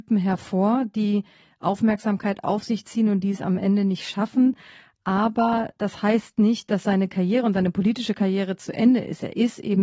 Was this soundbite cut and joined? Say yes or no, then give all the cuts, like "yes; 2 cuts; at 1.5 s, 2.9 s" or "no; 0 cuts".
no; 0 cuts